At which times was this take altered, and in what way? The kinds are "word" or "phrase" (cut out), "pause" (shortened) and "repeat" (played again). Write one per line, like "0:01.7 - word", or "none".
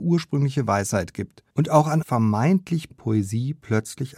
0:01.5 - pause
0:02.0 - phrase
0:02.9 - word